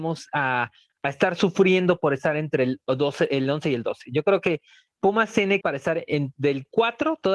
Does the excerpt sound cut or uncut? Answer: cut